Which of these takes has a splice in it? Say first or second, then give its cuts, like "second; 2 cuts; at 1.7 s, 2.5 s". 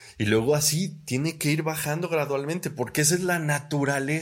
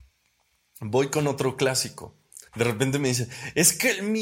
second; 1 cut; at 2.5 s